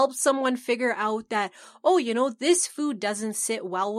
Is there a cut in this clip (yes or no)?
no